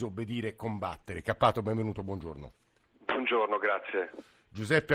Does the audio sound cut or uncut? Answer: uncut